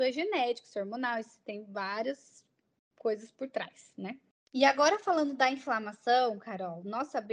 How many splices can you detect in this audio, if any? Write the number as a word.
zero